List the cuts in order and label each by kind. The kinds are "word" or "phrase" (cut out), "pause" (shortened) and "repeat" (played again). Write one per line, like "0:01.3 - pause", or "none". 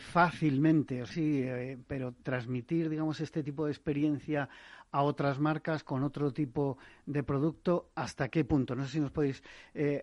0:01.1 - phrase
0:01.9 - word